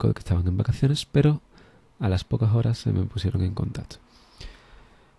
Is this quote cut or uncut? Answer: uncut